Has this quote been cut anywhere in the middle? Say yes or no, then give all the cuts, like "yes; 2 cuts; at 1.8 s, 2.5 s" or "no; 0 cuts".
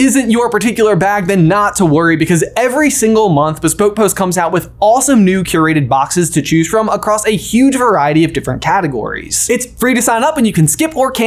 no; 0 cuts